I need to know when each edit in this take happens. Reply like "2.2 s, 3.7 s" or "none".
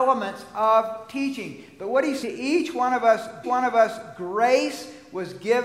2.2 s, 3.4 s